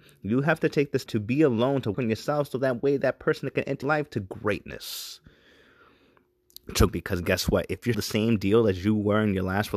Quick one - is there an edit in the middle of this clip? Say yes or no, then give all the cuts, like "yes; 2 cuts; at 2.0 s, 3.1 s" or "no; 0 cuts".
yes; 5 cuts; at 1.1 s, 1.9 s, 3.8 s, 6.9 s, 7.9 s